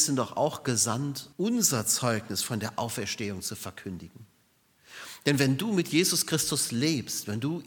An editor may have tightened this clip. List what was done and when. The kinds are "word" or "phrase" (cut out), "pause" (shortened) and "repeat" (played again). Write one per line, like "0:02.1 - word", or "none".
0:01.3 - pause